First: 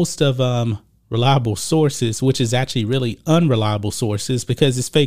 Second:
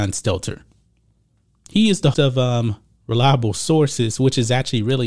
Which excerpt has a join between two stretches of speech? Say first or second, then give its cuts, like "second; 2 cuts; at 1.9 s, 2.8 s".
second; 1 cut; at 2.1 s